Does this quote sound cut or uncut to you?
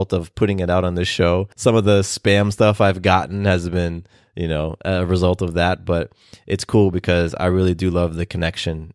cut